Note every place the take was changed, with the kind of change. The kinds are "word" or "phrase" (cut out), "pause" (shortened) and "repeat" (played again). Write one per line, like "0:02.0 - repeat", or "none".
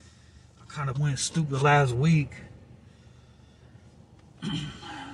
0:00.9 - word
0:01.6 - word